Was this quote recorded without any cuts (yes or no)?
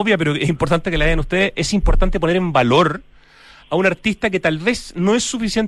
yes